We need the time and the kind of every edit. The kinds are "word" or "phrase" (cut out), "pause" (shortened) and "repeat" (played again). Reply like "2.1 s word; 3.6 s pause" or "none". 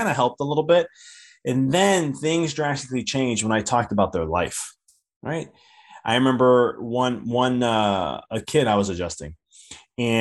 none